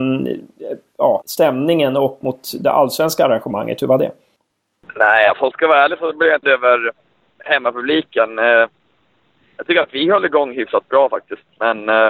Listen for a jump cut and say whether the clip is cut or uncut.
cut